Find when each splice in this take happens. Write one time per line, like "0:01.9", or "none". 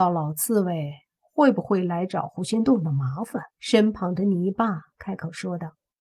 0:03.5